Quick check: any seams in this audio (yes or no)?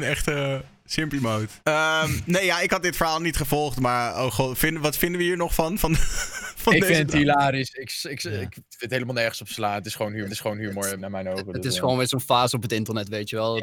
yes